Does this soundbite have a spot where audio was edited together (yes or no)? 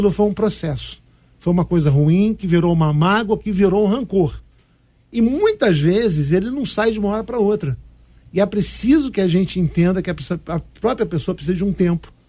no